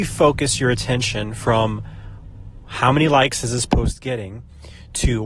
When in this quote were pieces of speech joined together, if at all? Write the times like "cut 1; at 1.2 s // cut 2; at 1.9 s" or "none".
none